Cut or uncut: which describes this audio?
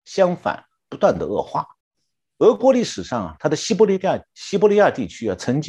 cut